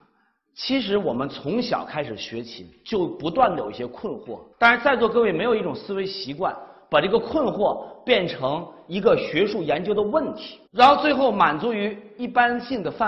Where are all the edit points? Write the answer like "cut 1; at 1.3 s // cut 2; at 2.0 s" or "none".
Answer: cut 1; at 4.5 s // cut 2; at 10.7 s